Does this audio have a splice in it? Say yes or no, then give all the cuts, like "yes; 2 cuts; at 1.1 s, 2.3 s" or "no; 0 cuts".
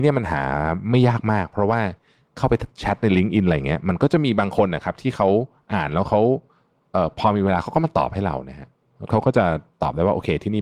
no; 0 cuts